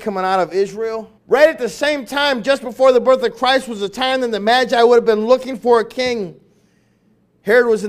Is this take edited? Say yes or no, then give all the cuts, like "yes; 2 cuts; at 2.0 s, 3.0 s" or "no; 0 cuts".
yes; 1 cut; at 1.2 s